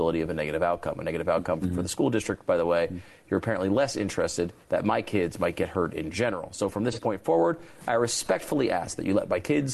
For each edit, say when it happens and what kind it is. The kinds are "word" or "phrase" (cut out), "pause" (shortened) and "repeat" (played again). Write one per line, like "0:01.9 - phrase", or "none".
0:04.6 - pause